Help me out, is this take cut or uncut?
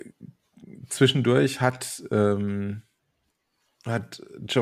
uncut